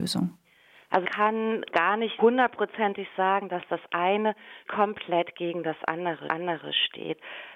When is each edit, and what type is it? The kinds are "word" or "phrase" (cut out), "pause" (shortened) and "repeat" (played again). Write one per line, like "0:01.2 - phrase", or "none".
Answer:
0:01.0 - word
0:01.7 - word
0:02.2 - word
0:04.7 - word
0:06.3 - repeat